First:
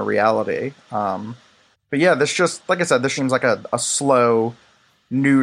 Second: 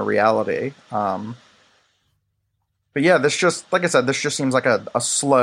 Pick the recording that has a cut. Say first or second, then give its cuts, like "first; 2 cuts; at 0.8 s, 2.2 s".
first; 2 cuts; at 1.7 s, 3.2 s